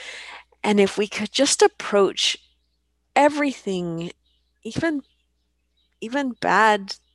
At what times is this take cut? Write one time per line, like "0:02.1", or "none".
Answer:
none